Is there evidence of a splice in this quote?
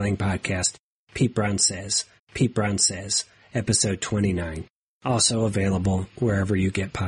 yes; 2 cuts; at 2.2 s, 4.9 s

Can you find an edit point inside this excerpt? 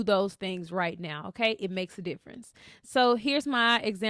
no; 0 cuts

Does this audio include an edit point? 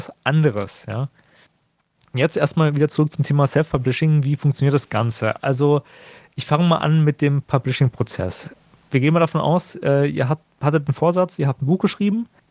no; 0 cuts

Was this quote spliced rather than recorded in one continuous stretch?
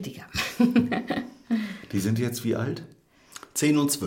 no; 0 cuts

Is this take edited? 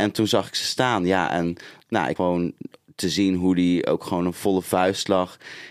yes; 1 cut; at 2.2 s

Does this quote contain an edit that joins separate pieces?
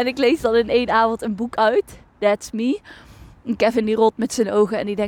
no; 0 cuts

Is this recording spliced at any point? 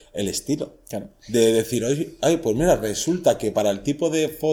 no; 0 cuts

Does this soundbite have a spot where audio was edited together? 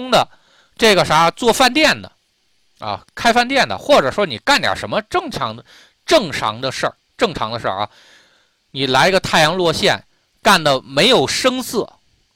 no; 0 cuts

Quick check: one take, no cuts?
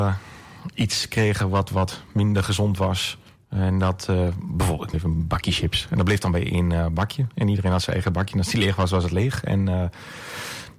no; 1 cut; at 4.9 s

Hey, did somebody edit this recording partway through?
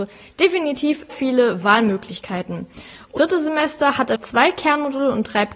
yes; 3 cuts; at 1.1 s, 3.2 s, 4.1 s

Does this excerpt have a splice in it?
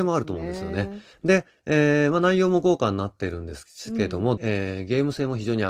yes; 2 cuts; at 1.1 s, 4.4 s

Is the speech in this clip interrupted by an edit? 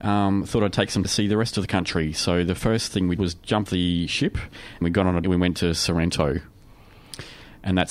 yes; 6 cuts; at 1.0 s, 3.2 s, 3.7 s, 4.8 s, 5.2 s, 5.5 s

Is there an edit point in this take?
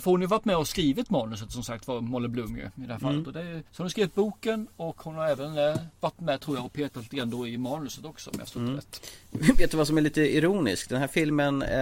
yes; 1 cut; at 3.7 s

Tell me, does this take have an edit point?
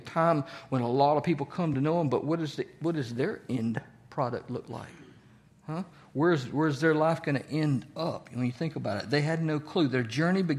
no; 0 cuts

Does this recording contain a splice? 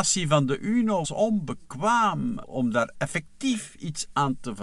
yes; 3 cuts; at 1.0 s, 2.4 s, 2.9 s

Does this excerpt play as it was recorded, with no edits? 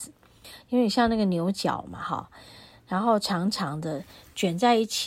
yes; 0 cuts

